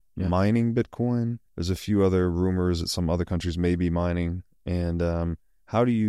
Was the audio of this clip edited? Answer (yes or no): yes